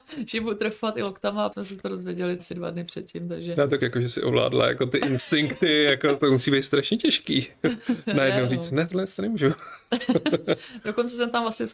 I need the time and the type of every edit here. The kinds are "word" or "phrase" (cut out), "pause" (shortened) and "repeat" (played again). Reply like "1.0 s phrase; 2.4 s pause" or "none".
1.5 s word; 2.4 s word; 3.8 s word; 6.2 s word